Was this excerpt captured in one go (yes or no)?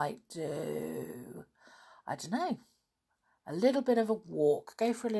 yes